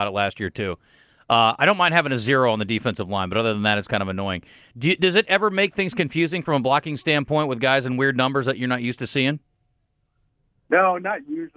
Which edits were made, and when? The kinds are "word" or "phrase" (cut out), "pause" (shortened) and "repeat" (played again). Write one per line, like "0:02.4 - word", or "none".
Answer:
none